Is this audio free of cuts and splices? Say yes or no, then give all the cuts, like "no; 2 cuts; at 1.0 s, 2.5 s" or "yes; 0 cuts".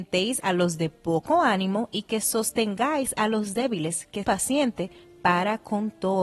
no; 1 cut; at 4.2 s